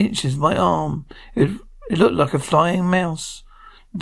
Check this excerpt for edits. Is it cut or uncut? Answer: uncut